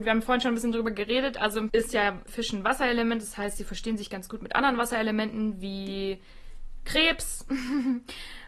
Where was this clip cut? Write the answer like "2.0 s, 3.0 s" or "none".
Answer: 1.7 s, 2.3 s